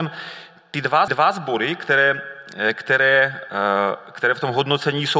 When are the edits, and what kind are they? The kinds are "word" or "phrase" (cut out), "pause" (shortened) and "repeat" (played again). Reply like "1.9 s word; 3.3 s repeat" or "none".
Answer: 1.1 s repeat